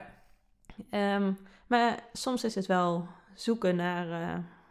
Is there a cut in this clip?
no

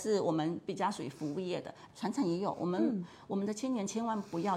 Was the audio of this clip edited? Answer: yes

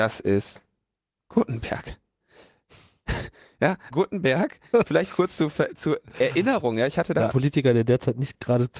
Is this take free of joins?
no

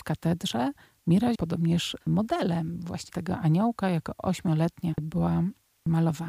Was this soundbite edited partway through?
yes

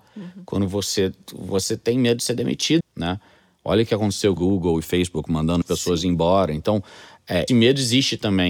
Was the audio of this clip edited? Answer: yes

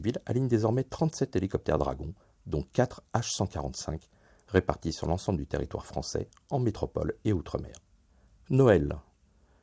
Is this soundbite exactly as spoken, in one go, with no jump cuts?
yes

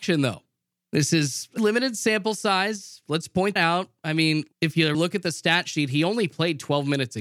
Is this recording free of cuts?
no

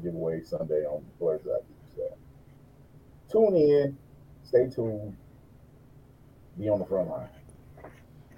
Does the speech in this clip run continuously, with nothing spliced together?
yes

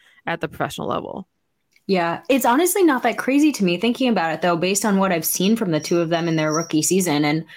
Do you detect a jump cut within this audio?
no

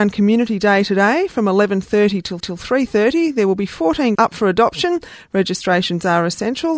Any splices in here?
yes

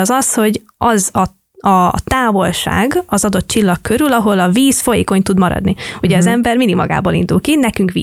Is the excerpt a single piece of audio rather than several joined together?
yes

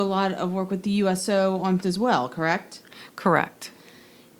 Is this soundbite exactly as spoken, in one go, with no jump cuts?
no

